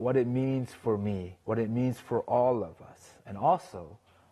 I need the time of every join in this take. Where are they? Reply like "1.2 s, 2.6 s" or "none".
1.4 s